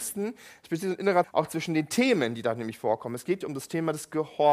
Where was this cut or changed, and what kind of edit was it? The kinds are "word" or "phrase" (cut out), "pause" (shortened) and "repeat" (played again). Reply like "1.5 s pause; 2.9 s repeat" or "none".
1.2 s word; 3.4 s word